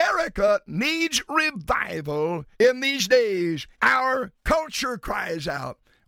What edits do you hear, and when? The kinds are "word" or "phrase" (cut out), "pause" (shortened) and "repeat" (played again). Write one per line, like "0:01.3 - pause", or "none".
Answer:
0:02.5 - pause
0:03.7 - pause